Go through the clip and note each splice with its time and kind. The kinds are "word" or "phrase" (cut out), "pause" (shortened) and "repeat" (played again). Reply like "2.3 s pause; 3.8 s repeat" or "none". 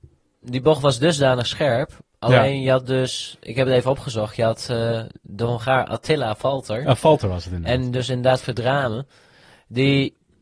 none